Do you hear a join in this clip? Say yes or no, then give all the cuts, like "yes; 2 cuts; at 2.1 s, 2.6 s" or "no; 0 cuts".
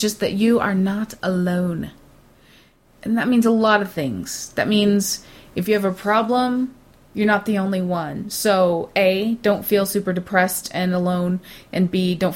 no; 0 cuts